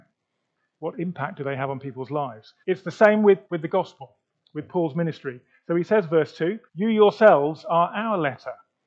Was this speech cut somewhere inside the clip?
yes; 3 cuts; at 2.6 s, 3.4 s, 6.7 s

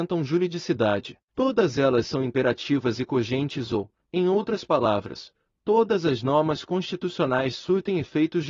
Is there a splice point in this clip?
yes; 1 cut; at 1.2 s

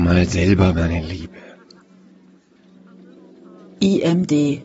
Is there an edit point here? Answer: no; 0 cuts

